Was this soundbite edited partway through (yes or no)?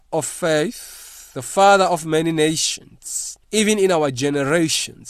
yes